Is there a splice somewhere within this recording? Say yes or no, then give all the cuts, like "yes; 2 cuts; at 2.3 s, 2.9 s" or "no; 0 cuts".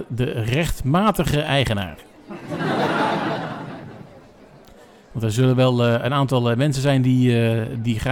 no; 0 cuts